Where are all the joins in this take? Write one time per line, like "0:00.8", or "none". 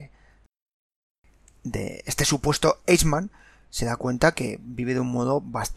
none